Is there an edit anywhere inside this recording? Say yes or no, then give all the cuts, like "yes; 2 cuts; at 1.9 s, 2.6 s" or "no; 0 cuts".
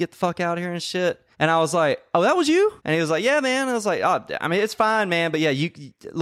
yes; 2 cuts; at 1.3 s, 2.8 s